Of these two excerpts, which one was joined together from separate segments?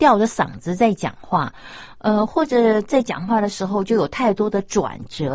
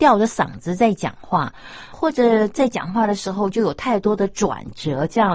second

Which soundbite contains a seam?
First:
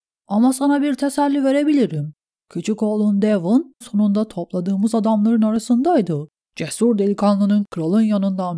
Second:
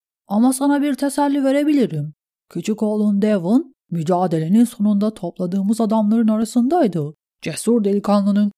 first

